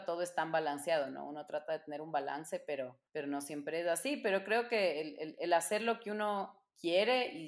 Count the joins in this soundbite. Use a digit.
1